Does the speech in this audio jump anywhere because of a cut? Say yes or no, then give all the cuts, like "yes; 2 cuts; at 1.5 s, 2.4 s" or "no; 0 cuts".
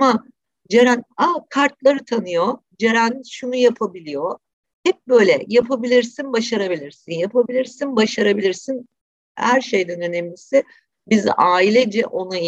no; 0 cuts